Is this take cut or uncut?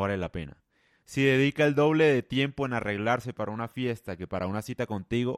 uncut